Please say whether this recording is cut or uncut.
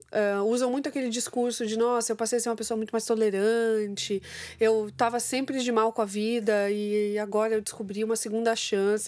uncut